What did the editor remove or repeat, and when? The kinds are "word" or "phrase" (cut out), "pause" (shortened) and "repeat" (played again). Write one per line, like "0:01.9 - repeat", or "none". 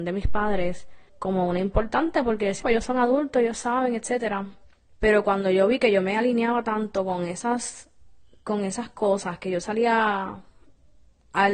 0:01.1 - pause
0:02.6 - word
0:04.9 - pause